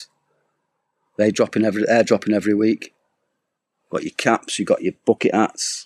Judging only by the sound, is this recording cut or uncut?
uncut